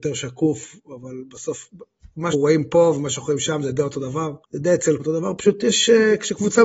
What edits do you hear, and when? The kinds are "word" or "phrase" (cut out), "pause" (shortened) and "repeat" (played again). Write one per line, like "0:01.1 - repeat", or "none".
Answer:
0:02.3 - word
0:04.4 - pause
0:05.0 - word